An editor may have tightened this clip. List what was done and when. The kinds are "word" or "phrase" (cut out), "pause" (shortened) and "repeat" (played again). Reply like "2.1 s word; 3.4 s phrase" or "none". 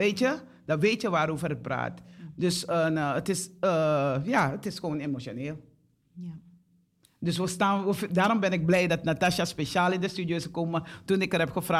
none